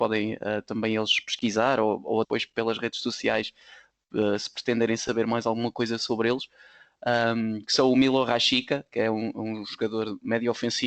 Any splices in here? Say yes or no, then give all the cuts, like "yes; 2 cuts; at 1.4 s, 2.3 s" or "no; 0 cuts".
yes; 1 cut; at 2.2 s